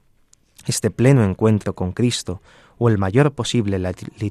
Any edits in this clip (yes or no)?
no